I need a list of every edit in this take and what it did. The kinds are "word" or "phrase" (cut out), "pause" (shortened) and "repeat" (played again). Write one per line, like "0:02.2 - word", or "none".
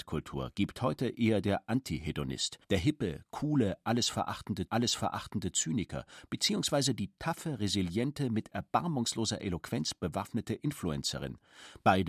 0:02.6 - pause
0:04.7 - repeat